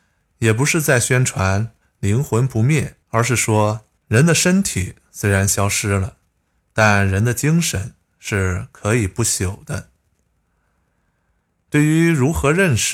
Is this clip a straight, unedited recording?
no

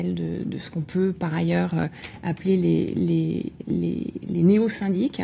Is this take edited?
no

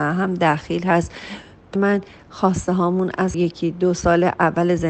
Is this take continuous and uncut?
no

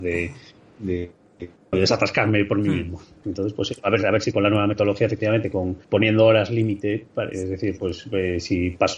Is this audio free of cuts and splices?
no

